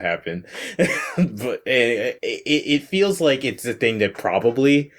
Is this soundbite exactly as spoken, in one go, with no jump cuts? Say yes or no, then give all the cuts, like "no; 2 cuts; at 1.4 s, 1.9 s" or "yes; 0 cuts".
yes; 0 cuts